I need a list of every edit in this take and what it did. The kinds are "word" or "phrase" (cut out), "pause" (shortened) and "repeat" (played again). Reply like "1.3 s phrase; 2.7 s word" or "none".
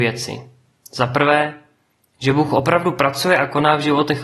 none